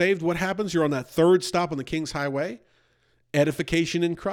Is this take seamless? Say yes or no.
yes